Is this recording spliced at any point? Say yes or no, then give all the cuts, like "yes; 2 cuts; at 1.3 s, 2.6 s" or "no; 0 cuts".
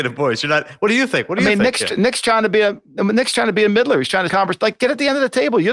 yes; 1 cut; at 4.3 s